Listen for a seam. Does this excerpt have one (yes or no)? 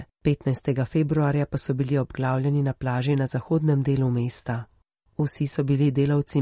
no